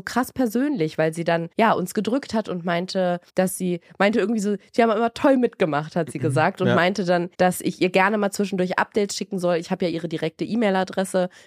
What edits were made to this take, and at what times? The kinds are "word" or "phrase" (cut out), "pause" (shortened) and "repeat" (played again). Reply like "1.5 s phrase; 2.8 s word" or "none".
1.5 s pause; 3.3 s pause; 7.3 s pause